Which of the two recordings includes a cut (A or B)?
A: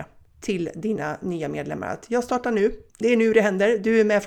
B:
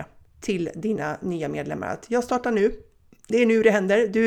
A